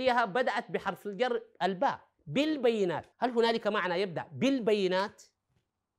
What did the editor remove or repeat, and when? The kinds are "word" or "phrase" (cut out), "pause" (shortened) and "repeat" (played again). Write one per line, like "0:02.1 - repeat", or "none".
0:01.5 - pause
0:03.1 - pause